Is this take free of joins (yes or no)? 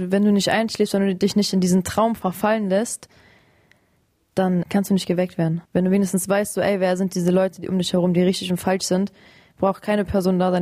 no